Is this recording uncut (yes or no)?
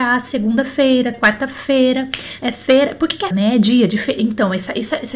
no